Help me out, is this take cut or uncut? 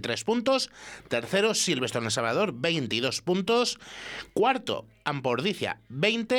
uncut